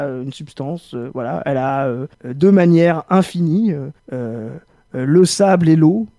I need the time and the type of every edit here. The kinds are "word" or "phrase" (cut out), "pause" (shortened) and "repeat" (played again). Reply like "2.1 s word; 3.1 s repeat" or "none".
2.1 s pause; 4.0 s pause